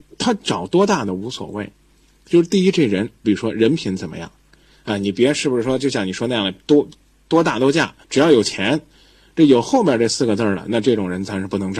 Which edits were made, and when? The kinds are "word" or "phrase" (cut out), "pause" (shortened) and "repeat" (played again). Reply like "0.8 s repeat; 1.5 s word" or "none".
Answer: 3.2 s word; 8.0 s pause